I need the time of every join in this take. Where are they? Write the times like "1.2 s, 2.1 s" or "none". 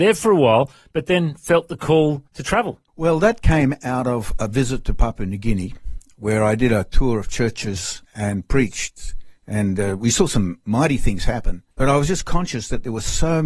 2.3 s, 2.9 s, 8.0 s, 11.7 s